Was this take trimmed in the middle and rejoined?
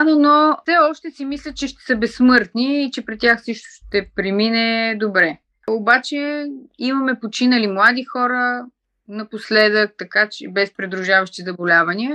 no; 0 cuts

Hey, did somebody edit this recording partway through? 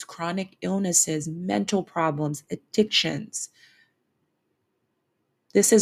no; 0 cuts

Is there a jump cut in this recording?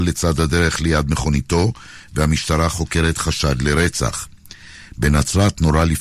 no; 0 cuts

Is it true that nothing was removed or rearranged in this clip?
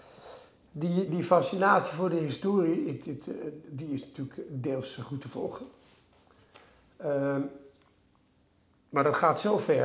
no; 1 cut; at 1.1 s

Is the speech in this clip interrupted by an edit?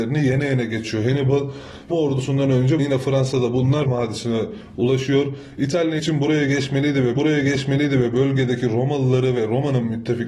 yes; 5 cuts; at 1.9 s, 2.8 s, 3.8 s, 6.0 s, 7.2 s

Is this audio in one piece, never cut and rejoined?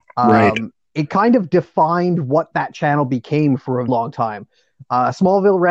no; 1 cut; at 3.9 s

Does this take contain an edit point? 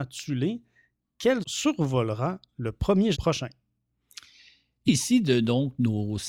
yes; 3 cuts; at 1.4 s, 3.1 s, 4.9 s

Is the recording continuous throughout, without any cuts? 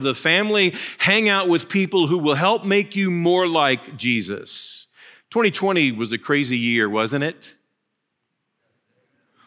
yes; 0 cuts

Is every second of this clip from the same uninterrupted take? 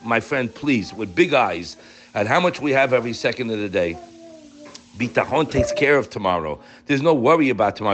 yes; 0 cuts

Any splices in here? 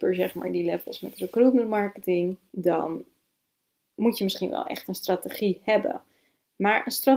no; 0 cuts

